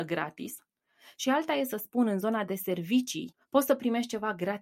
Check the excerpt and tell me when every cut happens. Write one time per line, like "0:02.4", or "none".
none

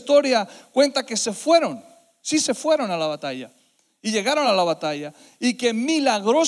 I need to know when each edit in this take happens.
none

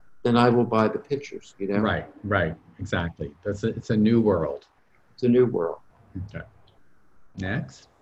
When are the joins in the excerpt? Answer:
none

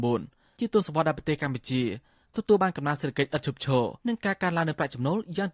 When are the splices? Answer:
0:04.0

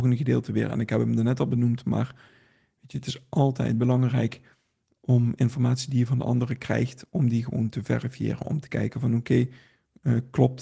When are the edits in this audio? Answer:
none

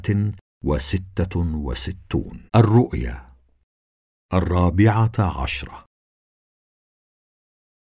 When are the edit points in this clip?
0:02.5

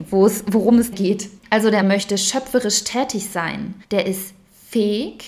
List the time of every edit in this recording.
0:00.9
0:01.4
0:01.8
0:03.8

